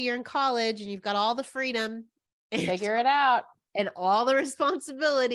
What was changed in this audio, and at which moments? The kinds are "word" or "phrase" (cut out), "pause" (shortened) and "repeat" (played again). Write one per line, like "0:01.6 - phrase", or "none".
none